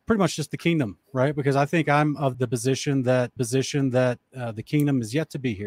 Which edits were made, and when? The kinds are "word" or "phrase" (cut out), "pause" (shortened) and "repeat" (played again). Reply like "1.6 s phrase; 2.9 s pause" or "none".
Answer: 1.0 s pause; 2.3 s word; 3.4 s repeat